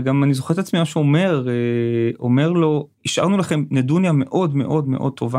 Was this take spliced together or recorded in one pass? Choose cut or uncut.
cut